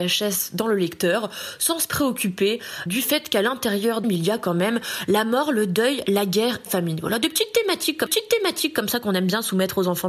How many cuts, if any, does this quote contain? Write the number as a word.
four